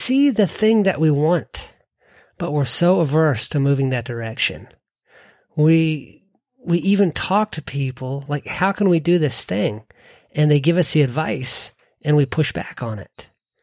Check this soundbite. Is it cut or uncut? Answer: uncut